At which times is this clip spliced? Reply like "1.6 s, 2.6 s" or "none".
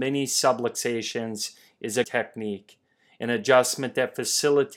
2.0 s